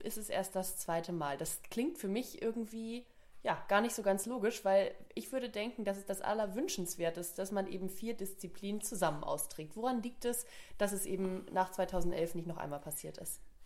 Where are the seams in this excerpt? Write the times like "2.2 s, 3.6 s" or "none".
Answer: 7.3 s